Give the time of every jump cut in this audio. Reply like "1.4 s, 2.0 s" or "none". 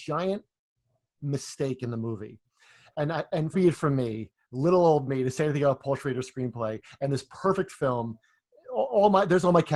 3.5 s